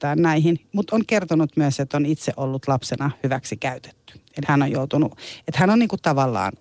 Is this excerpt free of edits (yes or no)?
no